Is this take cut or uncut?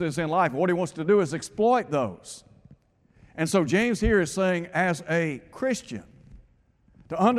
uncut